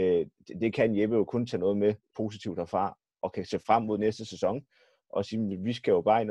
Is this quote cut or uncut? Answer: cut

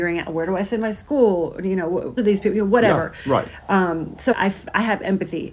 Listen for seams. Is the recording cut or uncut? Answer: cut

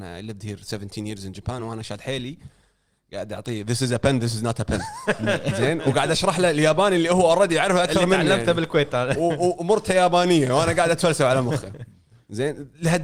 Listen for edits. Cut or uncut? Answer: uncut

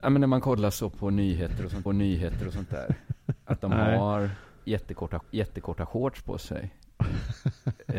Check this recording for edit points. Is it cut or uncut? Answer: cut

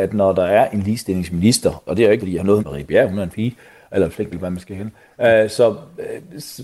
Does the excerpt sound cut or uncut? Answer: cut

